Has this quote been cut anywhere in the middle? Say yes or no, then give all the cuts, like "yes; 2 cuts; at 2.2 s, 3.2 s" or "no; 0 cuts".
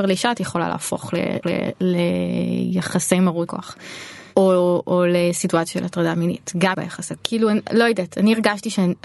yes; 4 cuts; at 1.4 s, 3.5 s, 6.7 s, 7.2 s